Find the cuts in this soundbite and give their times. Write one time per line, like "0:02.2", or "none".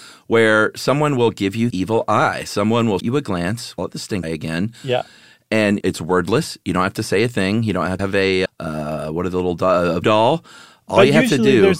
0:01.7
0:03.0
0:03.8
0:04.2
0:05.8
0:08.0
0:08.5
0:10.0